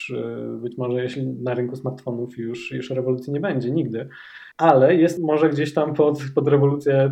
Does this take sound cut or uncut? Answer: cut